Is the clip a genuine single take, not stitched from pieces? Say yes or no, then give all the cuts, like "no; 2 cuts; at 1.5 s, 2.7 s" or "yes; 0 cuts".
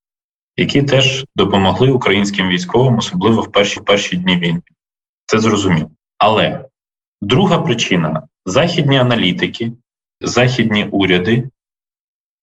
no; 2 cuts; at 3.8 s, 10.2 s